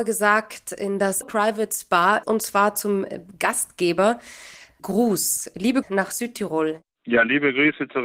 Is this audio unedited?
no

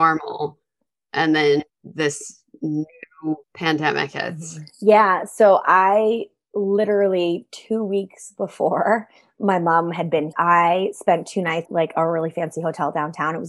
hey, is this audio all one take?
no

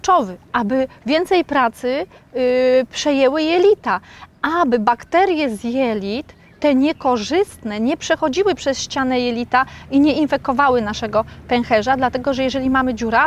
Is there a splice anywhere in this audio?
no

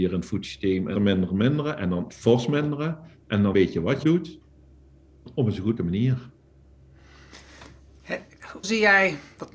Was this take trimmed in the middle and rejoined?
yes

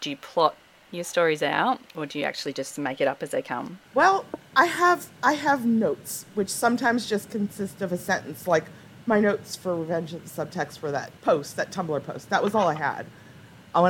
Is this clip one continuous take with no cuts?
no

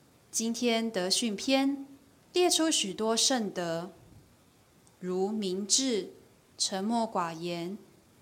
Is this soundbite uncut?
yes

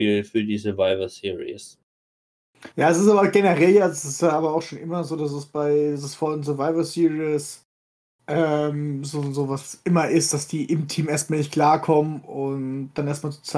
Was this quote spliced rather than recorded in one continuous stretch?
yes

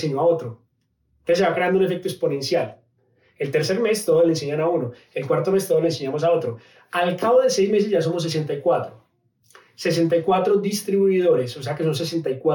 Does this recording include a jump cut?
no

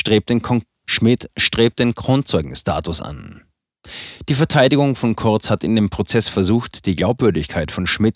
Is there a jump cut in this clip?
no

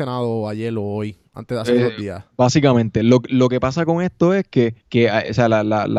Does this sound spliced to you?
yes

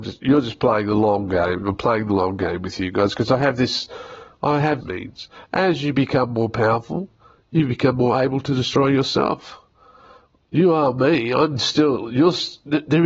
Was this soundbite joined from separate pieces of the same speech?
yes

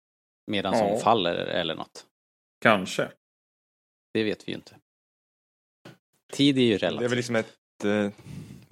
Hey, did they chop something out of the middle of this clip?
no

